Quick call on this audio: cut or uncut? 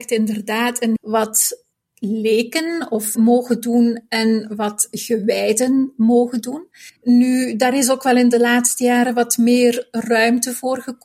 cut